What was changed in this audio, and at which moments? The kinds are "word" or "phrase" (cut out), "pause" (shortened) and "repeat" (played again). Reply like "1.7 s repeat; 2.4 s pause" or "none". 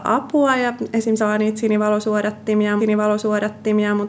1.2 s word; 2.8 s repeat